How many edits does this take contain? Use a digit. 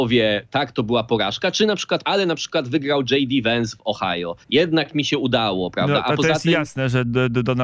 2